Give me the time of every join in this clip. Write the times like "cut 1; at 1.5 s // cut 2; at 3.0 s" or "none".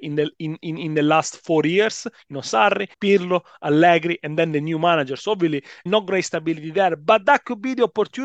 cut 1; at 2.9 s // cut 2; at 5.9 s